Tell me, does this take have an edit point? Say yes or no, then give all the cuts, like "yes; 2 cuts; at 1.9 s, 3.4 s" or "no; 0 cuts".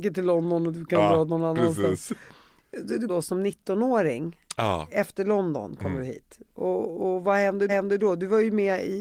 yes; 3 cuts; at 3.1 s, 6.5 s, 7.7 s